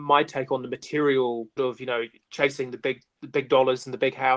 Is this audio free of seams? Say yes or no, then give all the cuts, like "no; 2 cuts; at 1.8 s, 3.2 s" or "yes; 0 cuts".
no; 1 cut; at 1.6 s